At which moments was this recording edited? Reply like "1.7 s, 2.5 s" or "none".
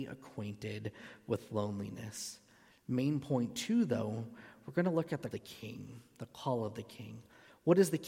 5.3 s